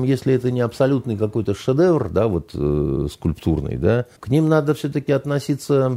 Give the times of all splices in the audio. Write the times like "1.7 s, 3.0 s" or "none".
4.2 s